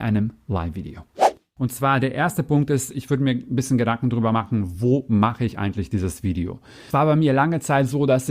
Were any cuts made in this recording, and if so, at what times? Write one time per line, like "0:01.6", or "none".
none